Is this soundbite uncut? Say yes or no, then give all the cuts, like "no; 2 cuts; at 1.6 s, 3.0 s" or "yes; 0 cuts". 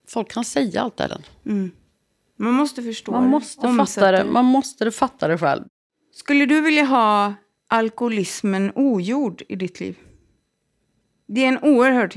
no; 1 cut; at 1.1 s